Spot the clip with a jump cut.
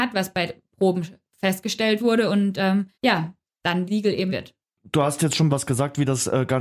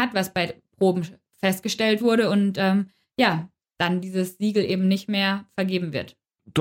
first; 4 cuts; at 2.9 s, 3.9 s, 4.3 s, 5.5 s

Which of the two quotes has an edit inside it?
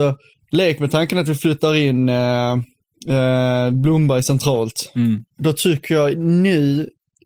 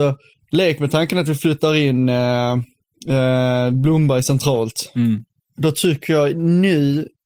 first; 1 cut; at 5.3 s

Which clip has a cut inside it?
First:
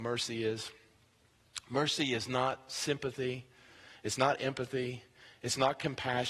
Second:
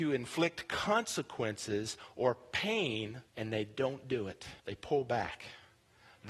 second; 2 cuts; at 3.3 s, 4.6 s

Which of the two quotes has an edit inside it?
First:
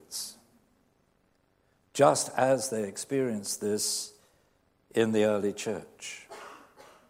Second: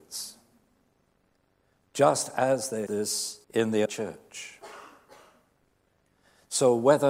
second; 3 cuts; at 2.9 s, 3.4 s, 3.9 s

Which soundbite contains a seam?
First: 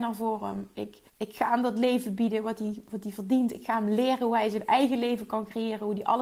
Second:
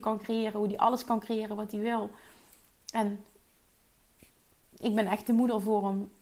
first; 1 cut; at 1.1 s

